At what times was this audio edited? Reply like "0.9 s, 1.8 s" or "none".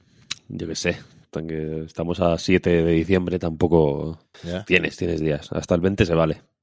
4.3 s